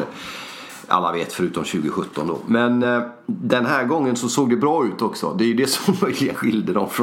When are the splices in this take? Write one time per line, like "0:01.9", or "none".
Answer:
none